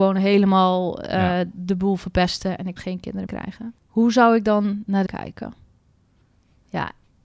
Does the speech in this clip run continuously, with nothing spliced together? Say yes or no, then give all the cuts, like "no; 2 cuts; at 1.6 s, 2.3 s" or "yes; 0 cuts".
no; 4 cuts; at 2.8 s, 3.3 s, 3.8 s, 5.1 s